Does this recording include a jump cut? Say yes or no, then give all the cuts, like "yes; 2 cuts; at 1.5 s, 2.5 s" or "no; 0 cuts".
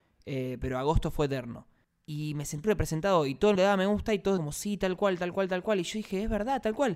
yes; 4 cuts; at 1.8 s, 2.6 s, 3.6 s, 4.4 s